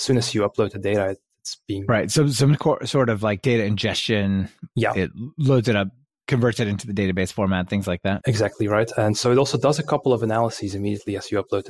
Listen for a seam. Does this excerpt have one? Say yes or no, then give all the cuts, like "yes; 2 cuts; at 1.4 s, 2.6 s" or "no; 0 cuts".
no; 0 cuts